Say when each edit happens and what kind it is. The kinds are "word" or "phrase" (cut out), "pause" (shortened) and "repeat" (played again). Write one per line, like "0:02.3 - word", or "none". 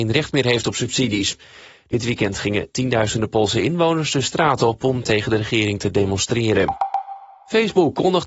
none